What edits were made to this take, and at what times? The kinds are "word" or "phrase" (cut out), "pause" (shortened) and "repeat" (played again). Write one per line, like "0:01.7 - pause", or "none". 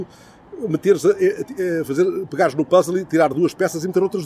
none